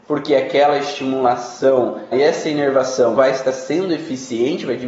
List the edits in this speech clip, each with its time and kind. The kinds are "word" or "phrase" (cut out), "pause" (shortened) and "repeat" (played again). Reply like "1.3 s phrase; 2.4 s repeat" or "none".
2.1 s word; 3.2 s word